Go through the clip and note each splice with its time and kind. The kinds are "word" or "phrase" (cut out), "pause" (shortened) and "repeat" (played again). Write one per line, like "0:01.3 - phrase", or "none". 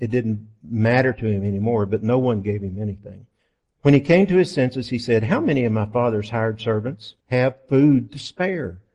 0:03.4 - pause
0:07.2 - pause

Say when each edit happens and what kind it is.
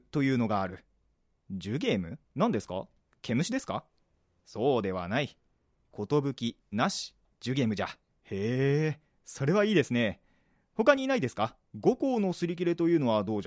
0:02.2 - pause
0:06.6 - phrase
0:07.3 - word
0:08.1 - pause
0:11.7 - pause

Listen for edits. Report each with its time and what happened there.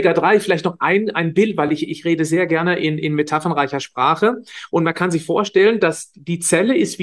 none

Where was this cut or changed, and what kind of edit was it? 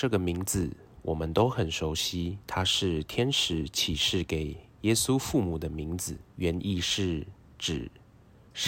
0:02.4 - pause
0:06.3 - pause

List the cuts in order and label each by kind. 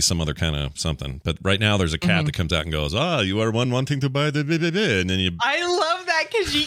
none

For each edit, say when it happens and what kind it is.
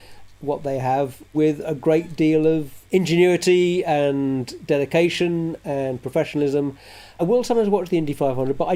none

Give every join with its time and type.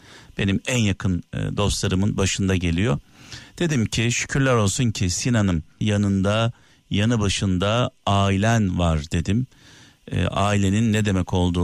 0:05.8 - word

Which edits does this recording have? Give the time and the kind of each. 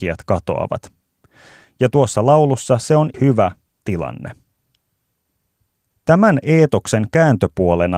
0:03.1 - word
0:03.8 - word

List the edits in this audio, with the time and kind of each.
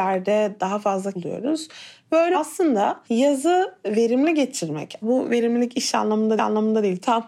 0:01.1 - word
0:02.3 - word
0:03.0 - pause
0:05.0 - word
0:06.4 - repeat

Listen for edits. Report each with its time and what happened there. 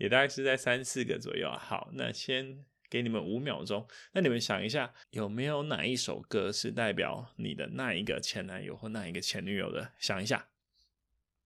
0:05.0 - pause

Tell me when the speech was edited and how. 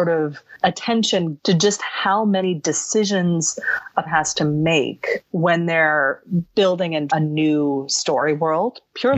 0:01.4 - word
0:04.1 - word
0:07.1 - word

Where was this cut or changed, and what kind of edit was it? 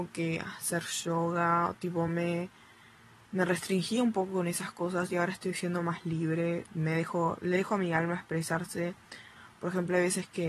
none

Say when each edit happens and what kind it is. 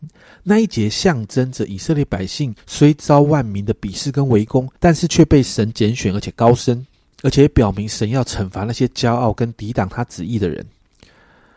0:02.6 - pause
0:04.8 - pause
0:06.9 - pause

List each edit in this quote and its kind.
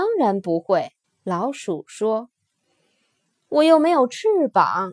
0:01.0 - pause

